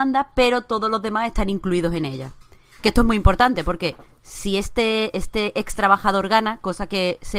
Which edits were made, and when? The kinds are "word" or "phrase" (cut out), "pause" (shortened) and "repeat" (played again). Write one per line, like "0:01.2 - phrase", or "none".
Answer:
none